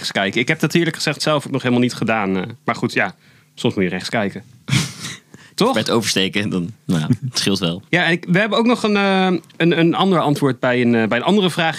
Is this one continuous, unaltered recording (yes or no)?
no